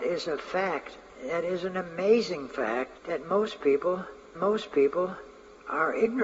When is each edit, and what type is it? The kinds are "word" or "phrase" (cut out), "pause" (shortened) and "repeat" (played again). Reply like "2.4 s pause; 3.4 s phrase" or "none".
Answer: 3.0 s pause; 4.3 s repeat